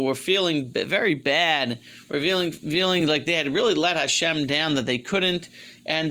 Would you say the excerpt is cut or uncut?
uncut